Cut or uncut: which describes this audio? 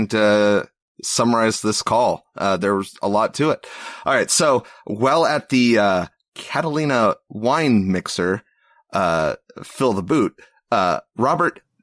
uncut